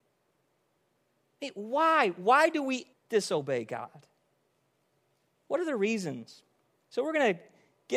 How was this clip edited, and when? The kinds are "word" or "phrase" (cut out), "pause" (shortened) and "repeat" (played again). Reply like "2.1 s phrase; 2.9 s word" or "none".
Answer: 2.9 s word